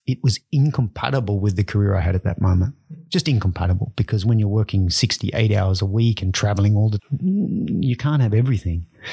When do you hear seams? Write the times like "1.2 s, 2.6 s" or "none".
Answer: 7.0 s